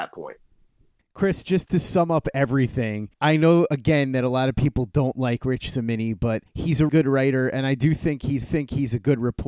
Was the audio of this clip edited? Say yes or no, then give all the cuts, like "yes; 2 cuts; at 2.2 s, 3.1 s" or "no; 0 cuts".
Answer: yes; 2 cuts; at 6.9 s, 8.4 s